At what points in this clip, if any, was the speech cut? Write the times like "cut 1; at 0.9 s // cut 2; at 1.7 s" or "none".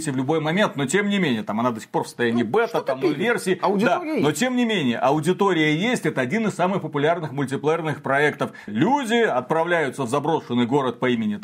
cut 1; at 8.7 s